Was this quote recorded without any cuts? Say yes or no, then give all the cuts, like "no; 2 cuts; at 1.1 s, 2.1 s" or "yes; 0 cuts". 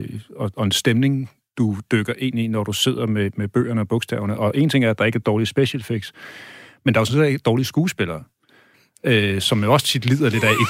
yes; 0 cuts